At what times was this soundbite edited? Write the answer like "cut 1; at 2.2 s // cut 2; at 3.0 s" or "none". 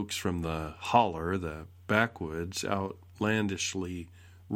none